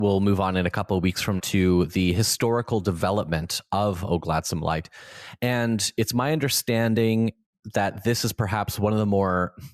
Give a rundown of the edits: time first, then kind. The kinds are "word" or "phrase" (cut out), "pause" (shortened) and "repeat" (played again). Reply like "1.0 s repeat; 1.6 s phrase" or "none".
1.4 s word